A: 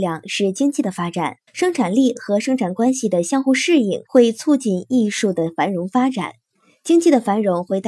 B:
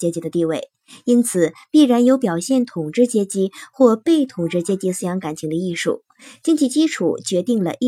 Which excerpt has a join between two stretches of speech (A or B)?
A